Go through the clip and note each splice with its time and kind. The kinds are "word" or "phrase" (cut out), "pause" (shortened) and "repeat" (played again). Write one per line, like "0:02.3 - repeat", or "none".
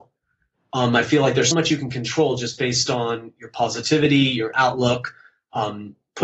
0:01.5 - word